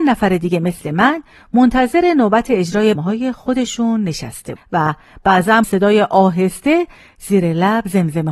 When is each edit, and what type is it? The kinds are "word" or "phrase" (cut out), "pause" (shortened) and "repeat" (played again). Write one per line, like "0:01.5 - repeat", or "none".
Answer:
0:02.9 - word
0:04.6 - word
0:05.6 - word